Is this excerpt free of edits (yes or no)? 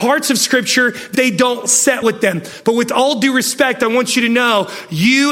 no